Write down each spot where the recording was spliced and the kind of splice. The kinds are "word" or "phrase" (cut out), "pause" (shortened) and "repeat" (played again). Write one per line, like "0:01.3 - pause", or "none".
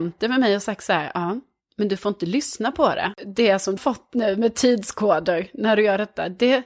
0:03.8 - word